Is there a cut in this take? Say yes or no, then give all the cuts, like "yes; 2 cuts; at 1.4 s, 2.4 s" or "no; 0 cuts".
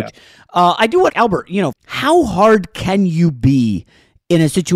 yes; 2 cuts; at 1.1 s, 1.7 s